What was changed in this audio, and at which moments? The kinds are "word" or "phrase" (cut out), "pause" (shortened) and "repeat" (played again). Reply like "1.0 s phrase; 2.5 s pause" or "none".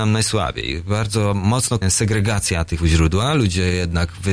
1.8 s word; 2.8 s word